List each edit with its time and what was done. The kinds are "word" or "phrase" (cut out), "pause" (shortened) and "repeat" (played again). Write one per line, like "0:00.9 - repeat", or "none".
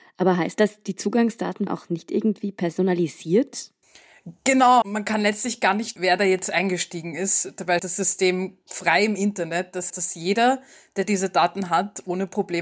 0:01.7 - word
0:04.8 - word
0:06.0 - word
0:07.8 - word
0:09.9 - word